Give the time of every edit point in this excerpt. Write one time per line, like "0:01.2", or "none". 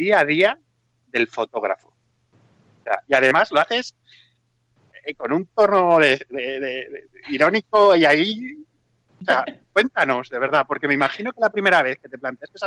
none